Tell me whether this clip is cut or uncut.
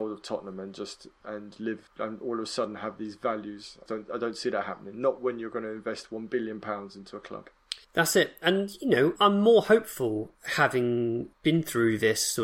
cut